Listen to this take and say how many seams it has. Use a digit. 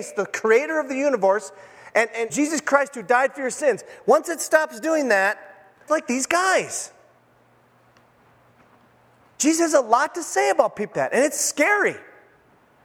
3